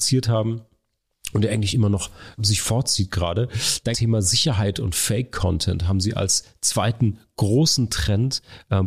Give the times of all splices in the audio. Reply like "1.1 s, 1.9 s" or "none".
2.4 s, 3.9 s